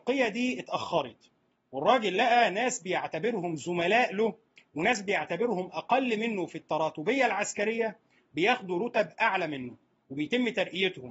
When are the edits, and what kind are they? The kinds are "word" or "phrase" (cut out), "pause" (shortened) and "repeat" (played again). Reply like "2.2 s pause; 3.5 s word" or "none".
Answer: none

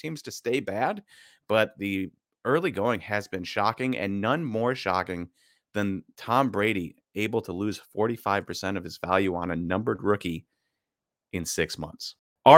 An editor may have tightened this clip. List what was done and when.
none

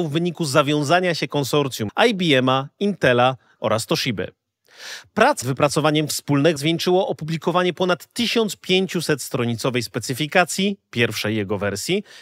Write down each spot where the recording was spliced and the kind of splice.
1.9 s word; 3.6 s word; 5.4 s word; 6.6 s word

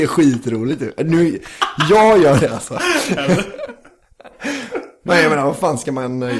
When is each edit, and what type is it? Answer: 2.4 s word

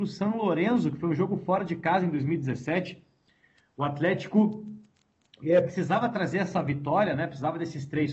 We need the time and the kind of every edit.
none

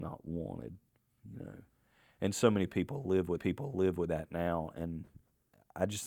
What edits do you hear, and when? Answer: 3.4 s repeat

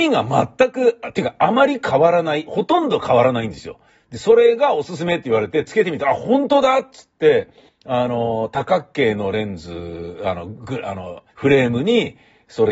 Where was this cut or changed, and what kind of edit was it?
3.9 s pause; 7.7 s pause; 11.3 s pause

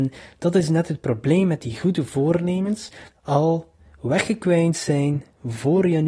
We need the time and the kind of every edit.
3.1 s phrase

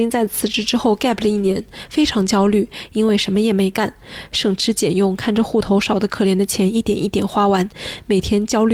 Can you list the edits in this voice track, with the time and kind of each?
none

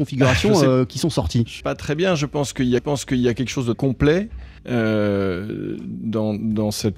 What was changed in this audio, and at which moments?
1.6 s word; 2.8 s repeat; 3.7 s word; 4.6 s pause

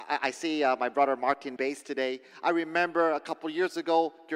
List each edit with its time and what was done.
1.6 s phrase

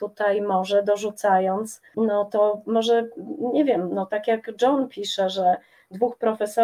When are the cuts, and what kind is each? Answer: 1.9 s word

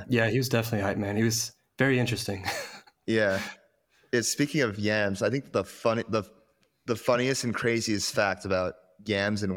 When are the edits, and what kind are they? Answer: none

